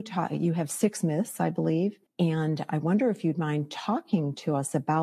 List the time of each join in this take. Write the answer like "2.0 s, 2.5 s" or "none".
2.1 s